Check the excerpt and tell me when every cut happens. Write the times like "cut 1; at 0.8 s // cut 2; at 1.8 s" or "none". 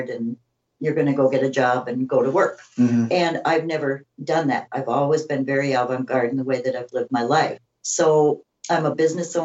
cut 1; at 7.6 s